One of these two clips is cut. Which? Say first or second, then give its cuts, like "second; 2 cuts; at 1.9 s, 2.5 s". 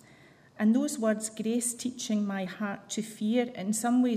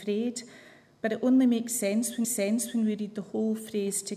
second; 1 cut; at 2.2 s